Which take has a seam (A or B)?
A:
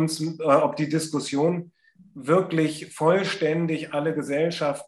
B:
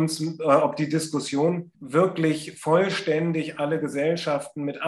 B